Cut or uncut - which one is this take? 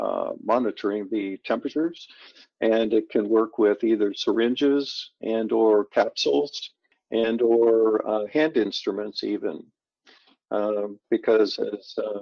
uncut